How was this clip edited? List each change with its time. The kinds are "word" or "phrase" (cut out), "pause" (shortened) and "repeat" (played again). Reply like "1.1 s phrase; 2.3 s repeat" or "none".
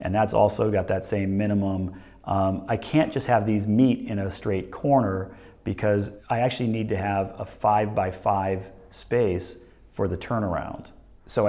none